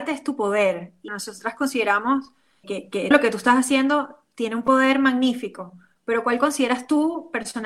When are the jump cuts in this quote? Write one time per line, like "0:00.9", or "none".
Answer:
0:01.1
0:02.6
0:03.1